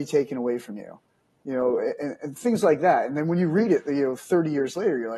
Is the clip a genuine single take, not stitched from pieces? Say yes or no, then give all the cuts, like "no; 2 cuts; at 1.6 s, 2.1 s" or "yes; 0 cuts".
yes; 0 cuts